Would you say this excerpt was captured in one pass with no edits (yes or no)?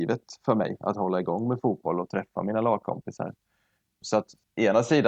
yes